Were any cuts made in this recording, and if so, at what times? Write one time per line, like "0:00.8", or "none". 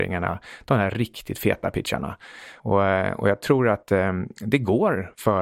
none